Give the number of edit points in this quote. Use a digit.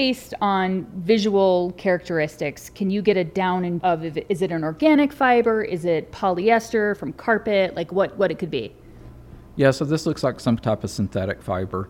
1